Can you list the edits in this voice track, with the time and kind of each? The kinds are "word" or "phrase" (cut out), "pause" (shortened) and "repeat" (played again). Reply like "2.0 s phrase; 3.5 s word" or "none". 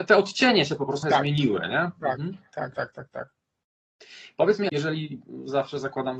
1.0 s word; 2.7 s word; 4.7 s word